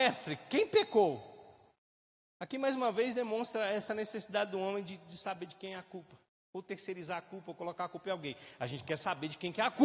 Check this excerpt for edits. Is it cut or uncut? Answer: uncut